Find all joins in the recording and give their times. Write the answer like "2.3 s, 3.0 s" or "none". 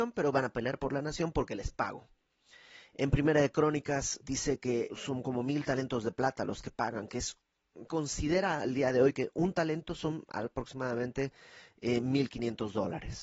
4.2 s, 4.9 s, 7.9 s